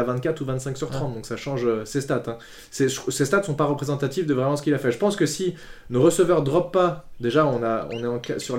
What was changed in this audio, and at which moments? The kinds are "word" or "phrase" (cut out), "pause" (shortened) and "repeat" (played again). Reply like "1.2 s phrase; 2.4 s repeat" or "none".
none